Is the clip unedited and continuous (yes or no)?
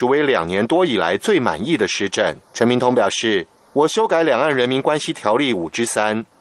no